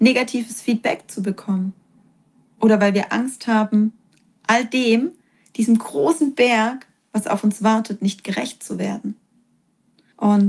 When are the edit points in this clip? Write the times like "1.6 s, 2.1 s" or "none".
none